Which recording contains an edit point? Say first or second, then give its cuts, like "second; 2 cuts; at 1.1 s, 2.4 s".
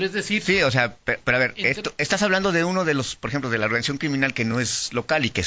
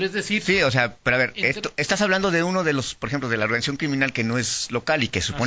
second; 1 cut; at 1.0 s